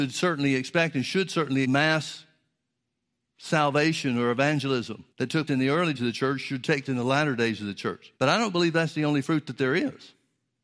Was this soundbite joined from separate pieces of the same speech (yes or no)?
yes